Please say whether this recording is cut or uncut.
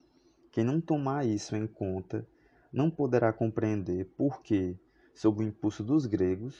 uncut